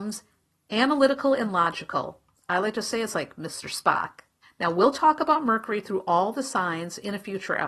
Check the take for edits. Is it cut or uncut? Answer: cut